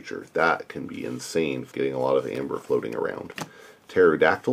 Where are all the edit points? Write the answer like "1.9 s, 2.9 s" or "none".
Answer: 1.7 s